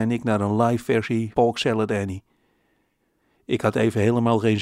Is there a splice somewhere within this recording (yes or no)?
yes